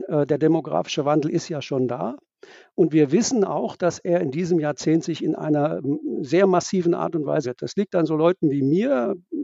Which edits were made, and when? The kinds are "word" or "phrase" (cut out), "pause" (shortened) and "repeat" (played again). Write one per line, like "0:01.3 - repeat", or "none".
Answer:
0:07.4 - word